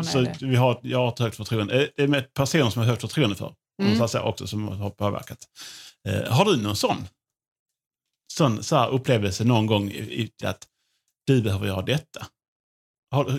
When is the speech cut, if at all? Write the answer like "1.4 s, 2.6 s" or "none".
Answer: 10.4 s

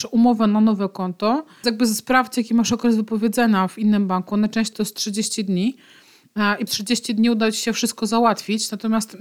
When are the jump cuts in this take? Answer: 1.6 s, 4.7 s, 6.7 s

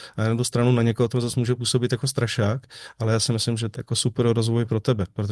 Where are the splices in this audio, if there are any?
3.7 s

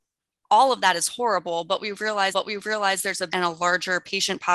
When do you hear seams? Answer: 2.3 s, 3.3 s

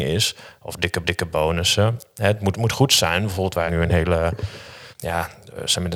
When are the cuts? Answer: 1.0 s, 2.5 s, 3.7 s, 4.9 s

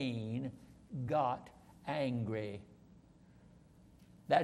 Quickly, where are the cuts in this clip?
none

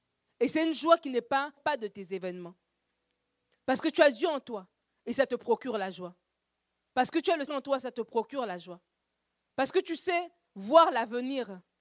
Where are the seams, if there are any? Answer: 1.6 s, 7.5 s

